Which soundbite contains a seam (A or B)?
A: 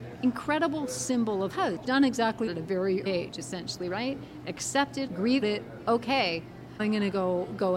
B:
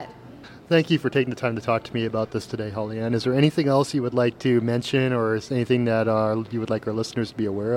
A